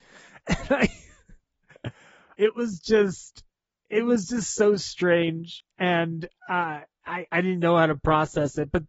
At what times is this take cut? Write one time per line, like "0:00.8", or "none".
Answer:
0:07.3